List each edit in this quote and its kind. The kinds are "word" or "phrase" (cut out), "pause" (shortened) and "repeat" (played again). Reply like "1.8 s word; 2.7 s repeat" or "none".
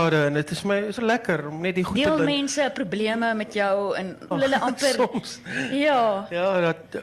1.0 s word; 2.2 s word; 4.3 s word